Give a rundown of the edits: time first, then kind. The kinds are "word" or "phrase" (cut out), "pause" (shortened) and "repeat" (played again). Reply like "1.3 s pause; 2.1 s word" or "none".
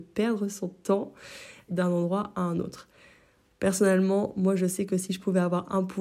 1.7 s phrase